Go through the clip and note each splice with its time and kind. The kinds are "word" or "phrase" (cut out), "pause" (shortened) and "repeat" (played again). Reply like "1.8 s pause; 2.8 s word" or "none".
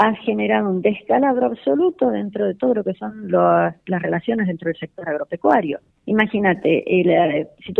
5.9 s pause